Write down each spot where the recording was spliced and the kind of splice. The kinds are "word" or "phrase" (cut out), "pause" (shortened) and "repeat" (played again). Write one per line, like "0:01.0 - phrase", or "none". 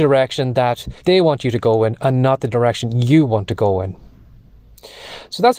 0:01.0 - pause